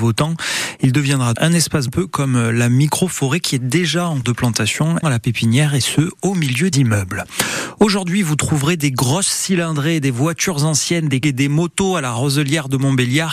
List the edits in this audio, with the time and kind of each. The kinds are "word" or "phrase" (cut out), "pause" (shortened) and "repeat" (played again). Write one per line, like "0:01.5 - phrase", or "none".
0:01.3 - word
0:01.9 - phrase
0:04.2 - word
0:05.0 - word
0:06.7 - word
0:11.2 - word